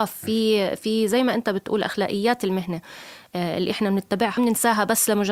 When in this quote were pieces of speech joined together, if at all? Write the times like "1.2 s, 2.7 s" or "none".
4.4 s

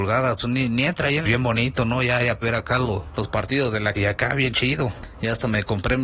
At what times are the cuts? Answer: 1.2 s, 2.4 s, 3.9 s

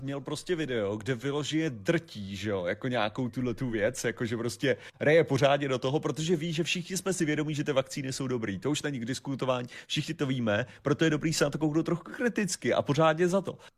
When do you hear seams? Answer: none

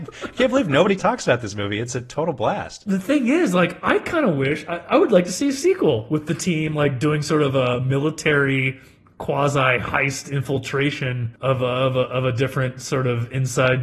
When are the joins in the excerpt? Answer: none

